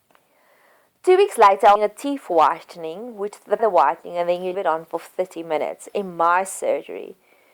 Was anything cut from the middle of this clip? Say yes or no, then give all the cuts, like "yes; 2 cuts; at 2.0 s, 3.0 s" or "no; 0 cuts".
yes; 3 cuts; at 1.8 s, 3.6 s, 4.5 s